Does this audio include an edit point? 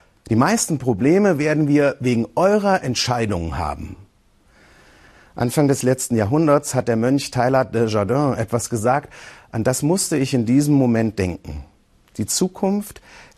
no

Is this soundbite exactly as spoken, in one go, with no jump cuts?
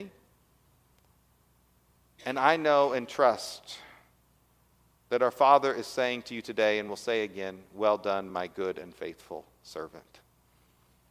yes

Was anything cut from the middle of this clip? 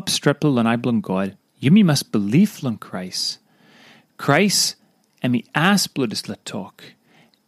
yes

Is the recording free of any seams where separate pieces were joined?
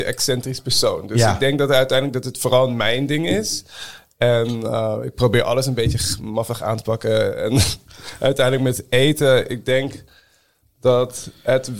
yes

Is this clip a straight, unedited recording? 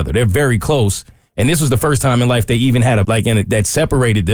no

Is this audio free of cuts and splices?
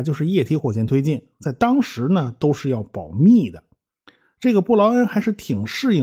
yes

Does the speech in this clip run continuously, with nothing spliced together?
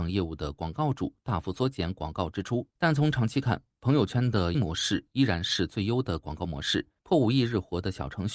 no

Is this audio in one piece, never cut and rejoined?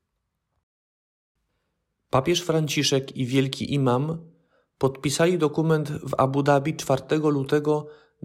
yes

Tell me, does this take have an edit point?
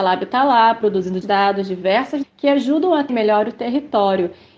yes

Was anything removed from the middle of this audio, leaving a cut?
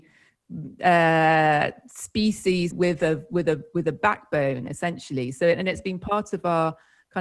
yes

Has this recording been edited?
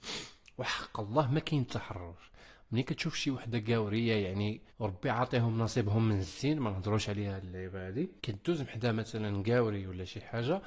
yes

